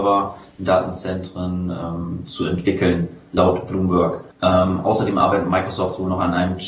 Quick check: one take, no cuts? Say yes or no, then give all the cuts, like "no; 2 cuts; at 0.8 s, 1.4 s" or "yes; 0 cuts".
no; 1 cut; at 4.3 s